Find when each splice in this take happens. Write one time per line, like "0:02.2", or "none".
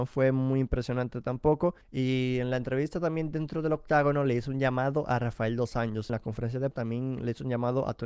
0:01.8
0:06.1
0:06.7